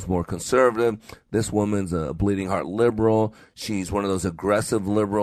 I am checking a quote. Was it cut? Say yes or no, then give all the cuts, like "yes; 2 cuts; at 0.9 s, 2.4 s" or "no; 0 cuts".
no; 0 cuts